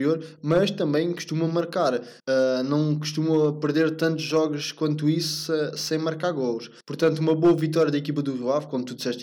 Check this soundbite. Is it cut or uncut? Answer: cut